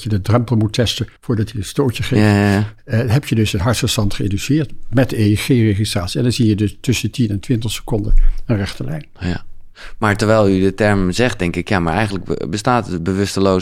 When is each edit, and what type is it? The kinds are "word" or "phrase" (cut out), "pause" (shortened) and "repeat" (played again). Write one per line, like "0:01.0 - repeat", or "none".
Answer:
0:01.2 - pause